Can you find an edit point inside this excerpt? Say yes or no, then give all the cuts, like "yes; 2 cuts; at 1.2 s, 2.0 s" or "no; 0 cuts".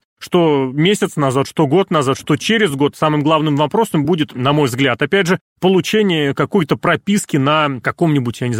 no; 0 cuts